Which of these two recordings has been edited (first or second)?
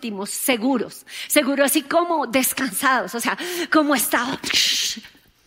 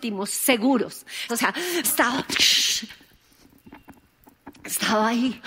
second